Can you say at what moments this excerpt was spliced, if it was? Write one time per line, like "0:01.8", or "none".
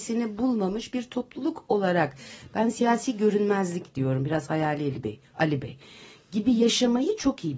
none